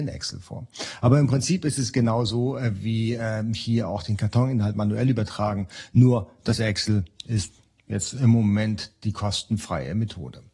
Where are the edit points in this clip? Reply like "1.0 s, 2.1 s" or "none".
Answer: none

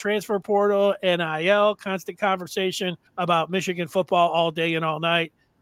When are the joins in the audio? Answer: 3.1 s

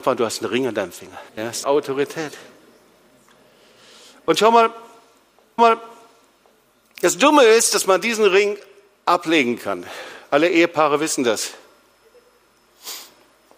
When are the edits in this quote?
1.3 s, 1.6 s, 5.6 s

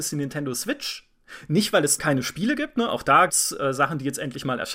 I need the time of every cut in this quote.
2.0 s, 3.3 s

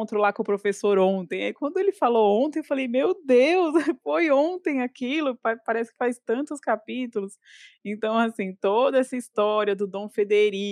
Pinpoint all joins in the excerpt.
none

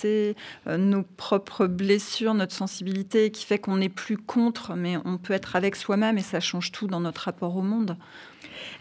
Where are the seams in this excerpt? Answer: none

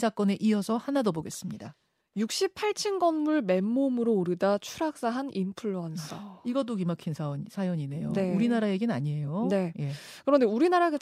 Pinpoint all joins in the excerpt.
none

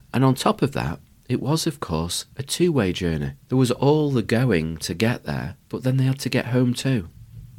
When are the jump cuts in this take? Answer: 1.1 s, 2.3 s, 3.4 s, 5.6 s

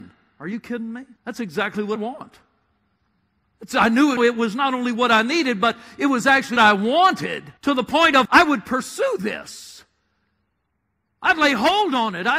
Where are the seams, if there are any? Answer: 1.2 s, 2.0 s, 3.0 s, 4.2 s, 6.6 s, 7.6 s, 8.3 s

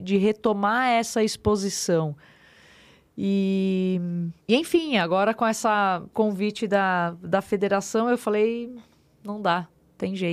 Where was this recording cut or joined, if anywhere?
4.4 s, 6.1 s

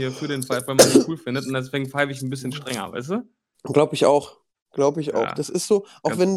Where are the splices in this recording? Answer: 3.5 s, 4.5 s

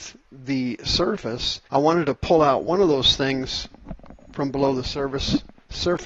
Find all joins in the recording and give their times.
1.7 s

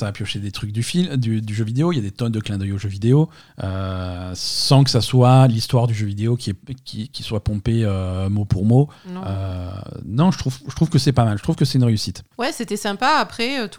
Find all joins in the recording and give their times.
3.4 s, 6.6 s, 9.0 s, 12.3 s

